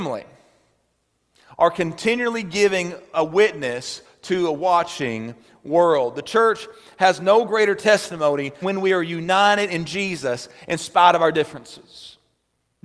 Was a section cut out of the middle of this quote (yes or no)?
yes